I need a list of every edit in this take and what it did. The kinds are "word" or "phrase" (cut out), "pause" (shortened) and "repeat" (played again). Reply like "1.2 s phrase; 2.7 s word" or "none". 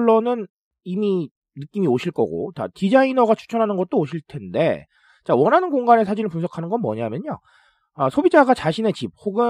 none